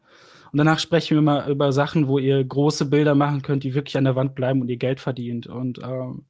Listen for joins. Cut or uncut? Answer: uncut